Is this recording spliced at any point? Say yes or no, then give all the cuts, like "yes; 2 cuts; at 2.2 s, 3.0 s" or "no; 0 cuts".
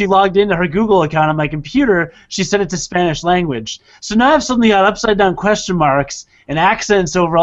no; 0 cuts